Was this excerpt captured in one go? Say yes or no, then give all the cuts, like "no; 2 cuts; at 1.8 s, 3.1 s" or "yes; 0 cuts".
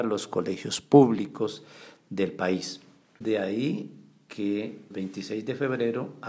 no; 1 cut; at 4.9 s